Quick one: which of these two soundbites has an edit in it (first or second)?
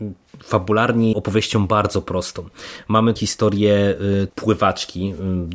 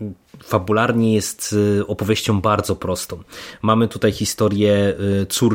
first